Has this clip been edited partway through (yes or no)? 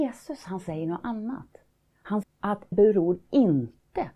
yes